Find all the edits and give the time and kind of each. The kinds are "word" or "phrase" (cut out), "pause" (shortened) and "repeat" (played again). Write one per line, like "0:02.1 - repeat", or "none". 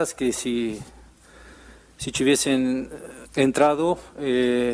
0:03.3 - pause